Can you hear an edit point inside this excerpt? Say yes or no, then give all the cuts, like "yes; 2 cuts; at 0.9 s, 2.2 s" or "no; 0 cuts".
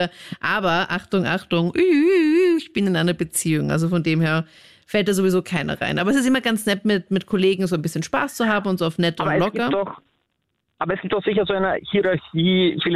no; 0 cuts